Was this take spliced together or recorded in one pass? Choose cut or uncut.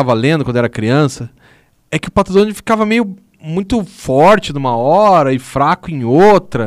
uncut